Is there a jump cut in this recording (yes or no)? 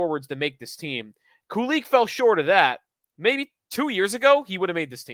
no